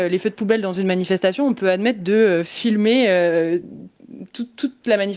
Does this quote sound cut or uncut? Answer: uncut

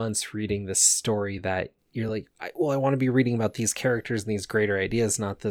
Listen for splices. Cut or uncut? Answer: uncut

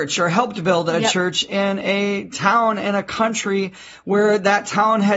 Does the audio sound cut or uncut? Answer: uncut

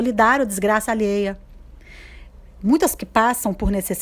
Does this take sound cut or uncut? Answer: cut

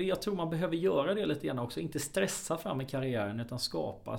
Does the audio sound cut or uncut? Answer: uncut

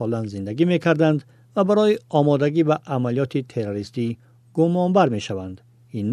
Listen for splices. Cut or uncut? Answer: uncut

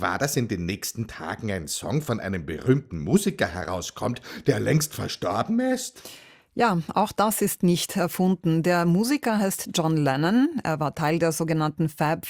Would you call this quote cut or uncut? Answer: uncut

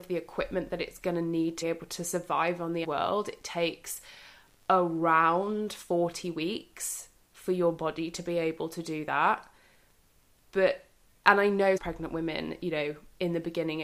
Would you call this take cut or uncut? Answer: cut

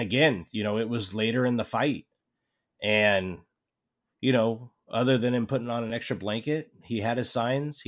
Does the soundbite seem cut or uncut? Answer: uncut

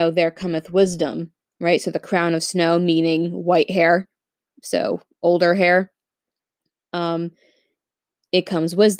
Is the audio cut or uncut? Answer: uncut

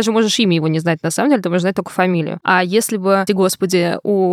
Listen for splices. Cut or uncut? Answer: cut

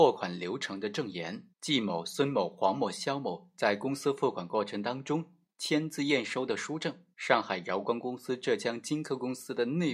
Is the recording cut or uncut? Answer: cut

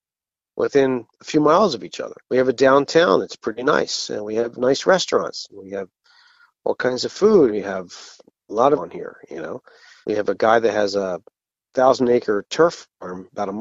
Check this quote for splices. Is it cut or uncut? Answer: cut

